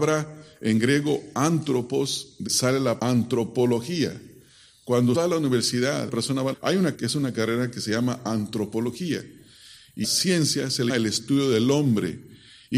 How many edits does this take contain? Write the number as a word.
eight